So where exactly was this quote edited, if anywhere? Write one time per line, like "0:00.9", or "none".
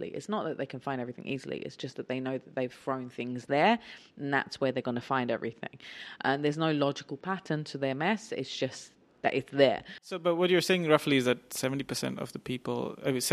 none